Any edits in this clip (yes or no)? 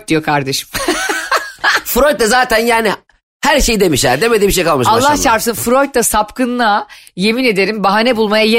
no